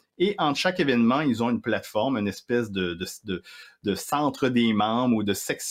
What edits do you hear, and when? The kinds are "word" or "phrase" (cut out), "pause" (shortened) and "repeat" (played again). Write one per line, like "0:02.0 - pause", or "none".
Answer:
none